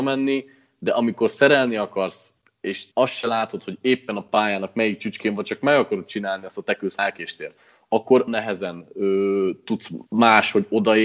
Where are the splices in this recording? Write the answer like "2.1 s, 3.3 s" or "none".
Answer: 2.9 s, 7.0 s, 8.3 s, 10.1 s